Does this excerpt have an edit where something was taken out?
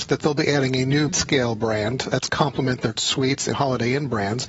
yes; 4 cuts; at 1.1 s, 2.3 s, 3.0 s, 3.5 s

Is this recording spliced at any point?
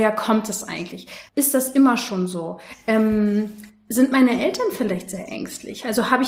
yes; 1 cut; at 1.3 s

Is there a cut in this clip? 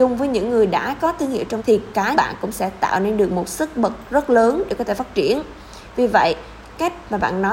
yes; 2 cuts; at 1.6 s, 2.1 s

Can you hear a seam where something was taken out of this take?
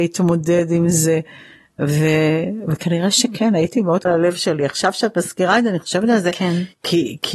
yes; 1 cut; at 4.1 s

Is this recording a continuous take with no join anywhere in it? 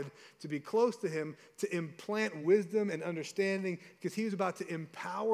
yes; 0 cuts

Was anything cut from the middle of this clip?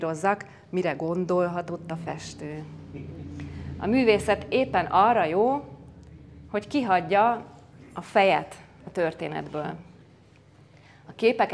no; 0 cuts

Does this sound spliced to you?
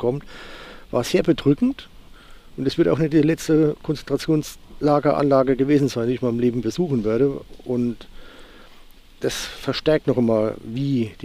no; 0 cuts

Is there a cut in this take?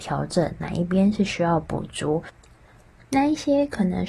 no; 0 cuts

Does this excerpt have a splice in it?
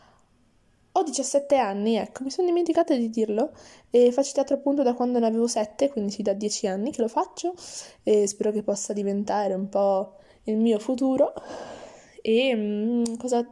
no; 0 cuts

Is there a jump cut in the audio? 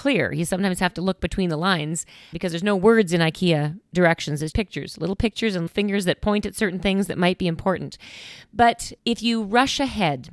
yes; 4 cuts; at 2.3 s, 4.5 s, 5.7 s, 9.0 s

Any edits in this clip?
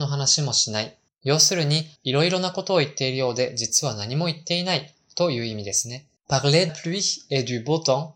yes; 4 cuts; at 1.1 s, 2.0 s, 6.2 s, 6.7 s

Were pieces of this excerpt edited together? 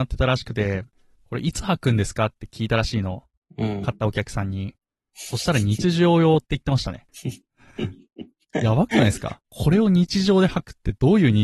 yes; 2 cuts; at 3.4 s, 9.4 s

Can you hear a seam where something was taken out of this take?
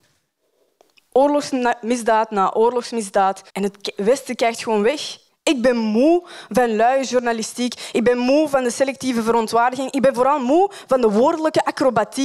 yes; 2 cuts; at 3.5 s, 5.3 s

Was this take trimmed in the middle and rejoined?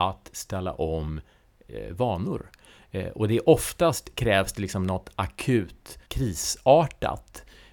yes; 1 cut; at 6.1 s

